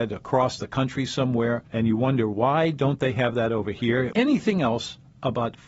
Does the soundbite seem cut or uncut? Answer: cut